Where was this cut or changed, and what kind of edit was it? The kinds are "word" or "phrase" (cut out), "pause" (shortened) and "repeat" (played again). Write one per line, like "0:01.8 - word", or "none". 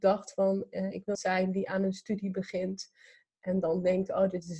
0:01.1 - phrase